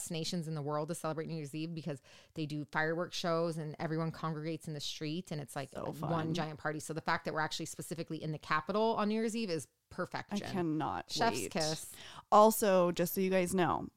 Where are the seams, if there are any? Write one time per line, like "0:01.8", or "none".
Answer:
none